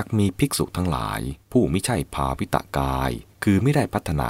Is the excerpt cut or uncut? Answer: cut